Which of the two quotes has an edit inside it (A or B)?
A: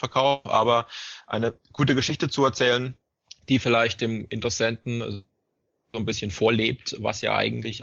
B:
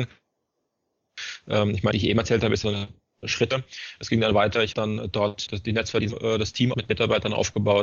B